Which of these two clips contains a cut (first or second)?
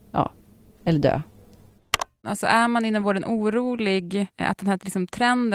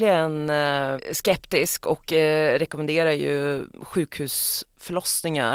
second